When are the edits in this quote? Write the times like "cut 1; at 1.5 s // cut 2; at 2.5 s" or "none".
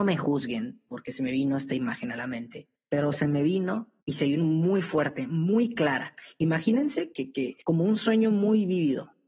cut 1; at 2.8 s // cut 2; at 4.0 s // cut 3; at 7.1 s // cut 4; at 7.6 s